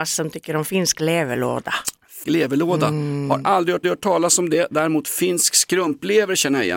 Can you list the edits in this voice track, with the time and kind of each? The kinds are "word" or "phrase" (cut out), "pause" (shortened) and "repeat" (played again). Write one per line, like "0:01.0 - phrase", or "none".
0:02.2 - word
0:03.8 - repeat